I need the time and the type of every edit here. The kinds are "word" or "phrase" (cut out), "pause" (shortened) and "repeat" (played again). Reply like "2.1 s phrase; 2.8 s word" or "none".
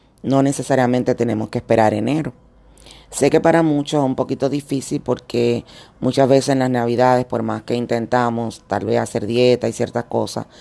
none